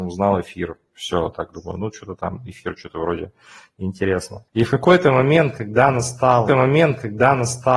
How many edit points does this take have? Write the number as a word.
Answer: two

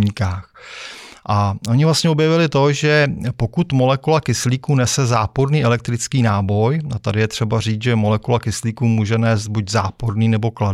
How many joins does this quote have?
zero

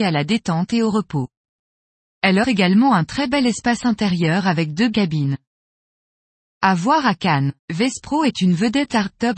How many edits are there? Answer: three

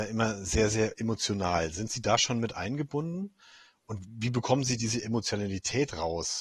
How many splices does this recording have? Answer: zero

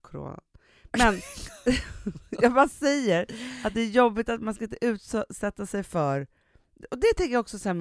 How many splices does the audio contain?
zero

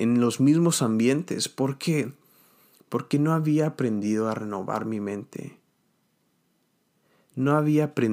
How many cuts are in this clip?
zero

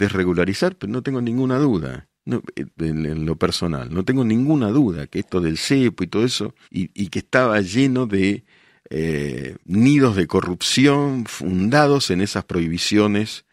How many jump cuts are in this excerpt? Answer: three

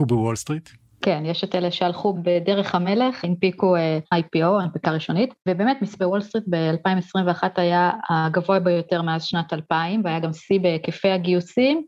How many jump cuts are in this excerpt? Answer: three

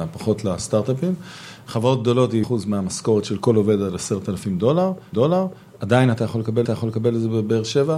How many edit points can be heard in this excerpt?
three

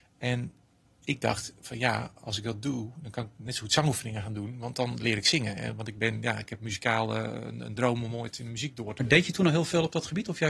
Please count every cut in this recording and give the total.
zero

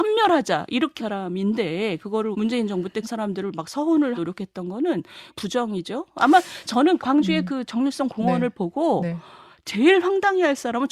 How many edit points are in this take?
six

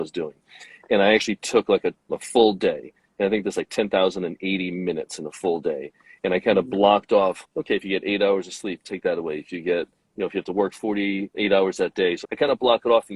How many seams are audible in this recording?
four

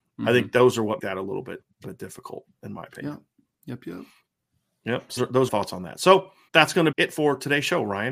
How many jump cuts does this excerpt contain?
six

